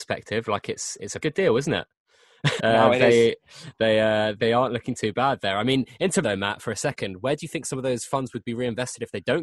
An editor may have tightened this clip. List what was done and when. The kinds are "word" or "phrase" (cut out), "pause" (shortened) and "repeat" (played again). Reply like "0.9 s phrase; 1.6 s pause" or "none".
1.2 s word; 2.6 s word; 4.4 s word; 6.2 s word